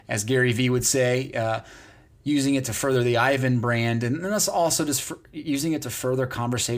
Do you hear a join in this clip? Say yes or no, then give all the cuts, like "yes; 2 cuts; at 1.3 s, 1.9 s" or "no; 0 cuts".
no; 0 cuts